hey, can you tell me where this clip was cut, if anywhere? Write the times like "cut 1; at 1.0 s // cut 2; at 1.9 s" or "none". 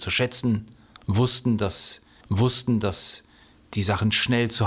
cut 1; at 2.2 s